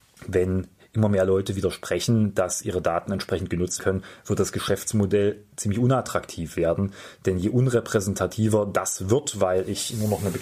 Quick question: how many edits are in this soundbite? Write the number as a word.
one